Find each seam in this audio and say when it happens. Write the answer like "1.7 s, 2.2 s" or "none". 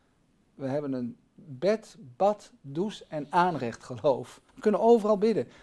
4.5 s